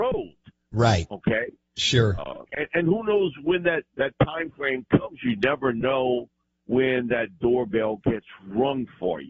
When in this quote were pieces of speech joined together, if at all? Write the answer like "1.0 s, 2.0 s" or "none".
2.5 s, 3.9 s, 6.4 s